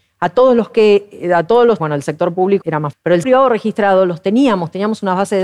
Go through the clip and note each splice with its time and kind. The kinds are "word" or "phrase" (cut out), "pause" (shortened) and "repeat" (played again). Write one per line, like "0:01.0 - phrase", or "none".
0:01.8 - word
0:02.6 - word
0:02.9 - word
0:03.2 - word